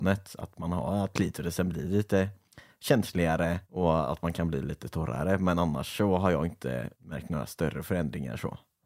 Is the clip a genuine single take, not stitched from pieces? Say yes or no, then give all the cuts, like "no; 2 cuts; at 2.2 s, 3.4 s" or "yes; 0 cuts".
no; 2 cuts; at 3.6 s, 6.9 s